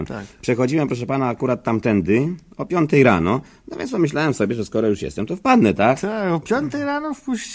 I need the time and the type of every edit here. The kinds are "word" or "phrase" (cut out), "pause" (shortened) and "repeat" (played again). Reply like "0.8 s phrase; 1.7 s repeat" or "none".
none